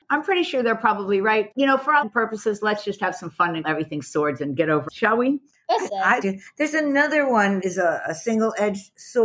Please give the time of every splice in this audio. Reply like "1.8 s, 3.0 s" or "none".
1.5 s, 2.0 s, 3.6 s, 4.9 s, 5.9 s, 6.2 s, 7.6 s